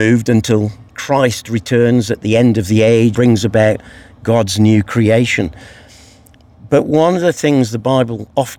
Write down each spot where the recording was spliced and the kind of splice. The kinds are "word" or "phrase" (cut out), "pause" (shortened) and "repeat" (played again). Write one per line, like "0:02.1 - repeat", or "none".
0:03.1 - word